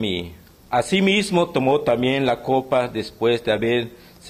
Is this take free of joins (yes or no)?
yes